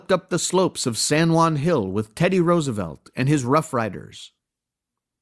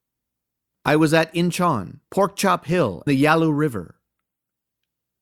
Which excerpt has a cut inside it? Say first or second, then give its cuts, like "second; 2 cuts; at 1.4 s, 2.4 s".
second; 2 cuts; at 2.0 s, 3.1 s